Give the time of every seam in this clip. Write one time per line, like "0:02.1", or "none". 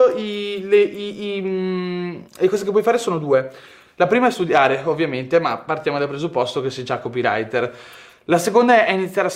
0:02.3